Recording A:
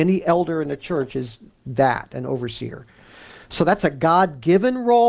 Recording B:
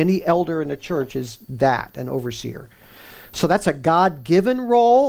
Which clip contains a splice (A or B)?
B